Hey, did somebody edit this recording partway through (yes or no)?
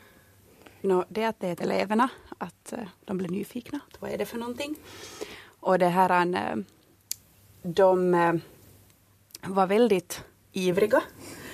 yes